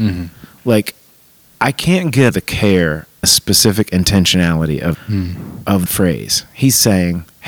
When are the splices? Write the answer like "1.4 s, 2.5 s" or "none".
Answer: 2.3 s, 3.2 s, 4.9 s, 5.9 s